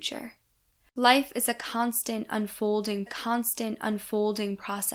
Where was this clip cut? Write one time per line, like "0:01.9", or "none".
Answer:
0:03.1